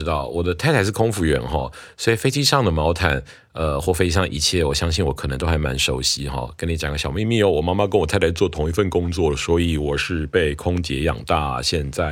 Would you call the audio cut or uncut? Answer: uncut